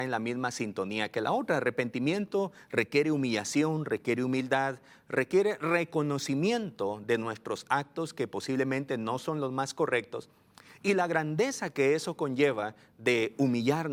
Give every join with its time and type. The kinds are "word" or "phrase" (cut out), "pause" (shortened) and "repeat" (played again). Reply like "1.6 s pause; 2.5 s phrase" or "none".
none